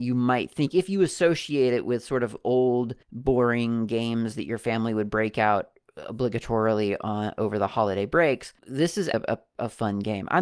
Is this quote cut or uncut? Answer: cut